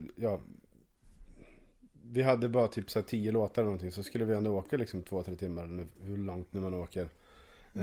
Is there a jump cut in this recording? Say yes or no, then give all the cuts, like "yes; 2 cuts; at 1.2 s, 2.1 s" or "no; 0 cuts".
no; 0 cuts